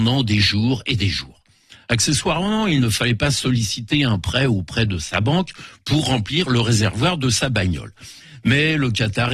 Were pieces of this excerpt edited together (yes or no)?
no